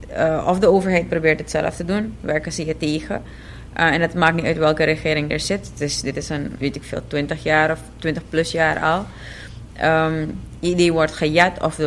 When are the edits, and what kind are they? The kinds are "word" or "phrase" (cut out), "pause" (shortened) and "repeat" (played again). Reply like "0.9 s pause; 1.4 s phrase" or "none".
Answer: 6.5 s phrase